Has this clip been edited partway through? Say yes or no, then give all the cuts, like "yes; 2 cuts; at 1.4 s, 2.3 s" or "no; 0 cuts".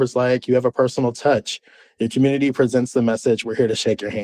no; 0 cuts